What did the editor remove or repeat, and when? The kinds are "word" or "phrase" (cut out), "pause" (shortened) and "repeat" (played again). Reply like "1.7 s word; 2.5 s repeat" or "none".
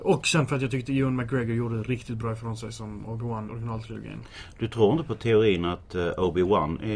3.5 s word